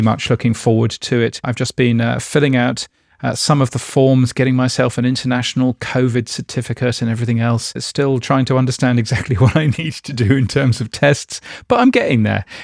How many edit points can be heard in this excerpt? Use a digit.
0